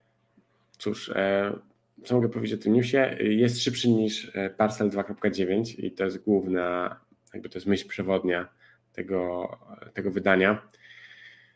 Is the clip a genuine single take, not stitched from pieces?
yes; 0 cuts

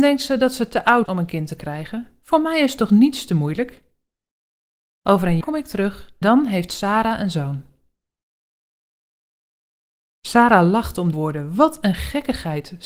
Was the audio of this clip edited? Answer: yes; 4 cuts; at 1.1 s, 5.4 s, 6.2 s, 11.1 s

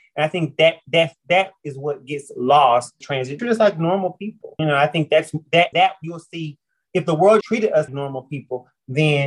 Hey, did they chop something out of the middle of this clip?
yes; 6 cuts; at 3.0 s, 3.4 s, 4.6 s, 5.7 s, 7.4 s, 7.9 s

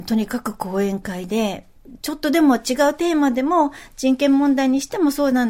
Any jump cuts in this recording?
no; 0 cuts

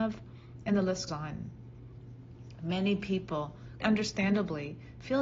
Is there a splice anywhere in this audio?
yes; 2 cuts; at 1.1 s, 3.8 s

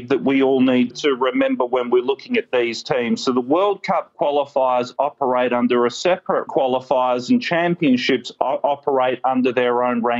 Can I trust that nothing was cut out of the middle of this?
no; 2 cuts; at 0.9 s, 6.5 s

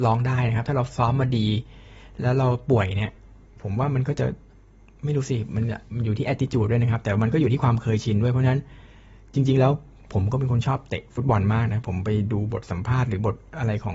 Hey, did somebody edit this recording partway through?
no; 0 cuts

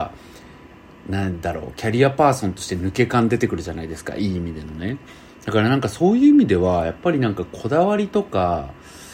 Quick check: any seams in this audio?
no; 0 cuts

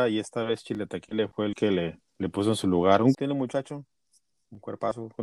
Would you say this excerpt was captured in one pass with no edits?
no; 2 cuts; at 2.1 s, 3.1 s

